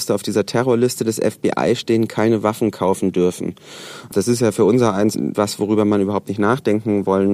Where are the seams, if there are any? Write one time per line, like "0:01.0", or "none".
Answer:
0:05.1